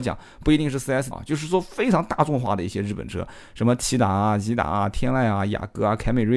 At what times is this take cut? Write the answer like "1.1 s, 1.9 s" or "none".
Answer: 1.1 s